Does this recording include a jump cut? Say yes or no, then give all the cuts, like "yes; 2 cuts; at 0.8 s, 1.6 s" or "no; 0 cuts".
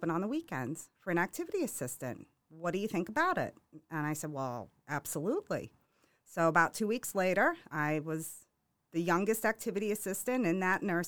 no; 0 cuts